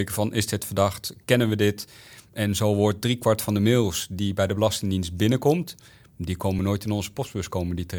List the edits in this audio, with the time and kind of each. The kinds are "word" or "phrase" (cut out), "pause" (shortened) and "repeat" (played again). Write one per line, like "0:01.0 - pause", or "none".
none

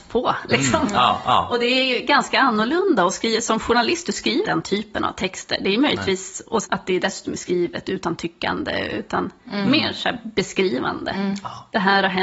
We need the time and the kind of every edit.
0:04.4 - word
0:06.6 - word

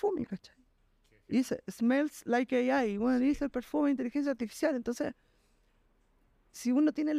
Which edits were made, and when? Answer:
none

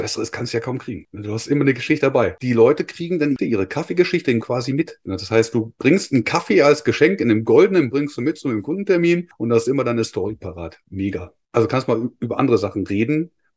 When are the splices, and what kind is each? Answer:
0:04.4 - phrase
0:07.9 - word

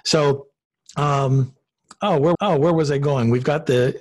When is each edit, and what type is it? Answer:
0:02.3 - repeat

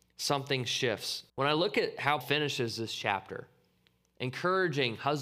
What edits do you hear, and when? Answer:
0:01.3 - pause
0:02.2 - word

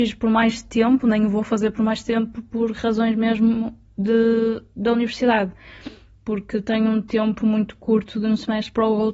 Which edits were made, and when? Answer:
none

